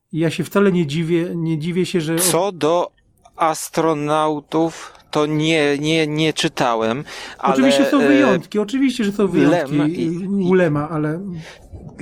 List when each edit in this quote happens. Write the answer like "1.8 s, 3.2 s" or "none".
none